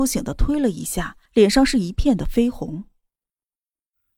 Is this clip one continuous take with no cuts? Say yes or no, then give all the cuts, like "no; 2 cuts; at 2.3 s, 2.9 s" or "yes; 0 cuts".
no; 1 cut; at 1.3 s